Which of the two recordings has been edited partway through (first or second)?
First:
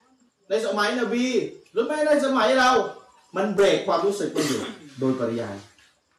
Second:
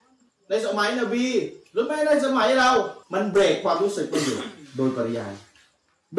second